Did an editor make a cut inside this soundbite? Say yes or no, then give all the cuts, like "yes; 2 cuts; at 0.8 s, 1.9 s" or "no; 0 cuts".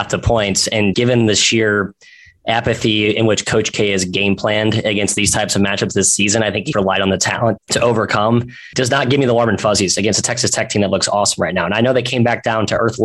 yes; 3 cuts; at 0.9 s, 6.7 s, 7.6 s